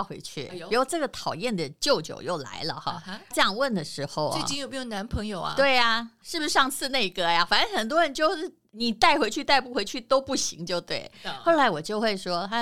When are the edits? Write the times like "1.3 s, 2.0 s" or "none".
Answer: 3.3 s, 6.2 s